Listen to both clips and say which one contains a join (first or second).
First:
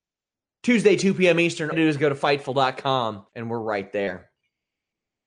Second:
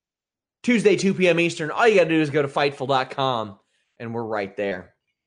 first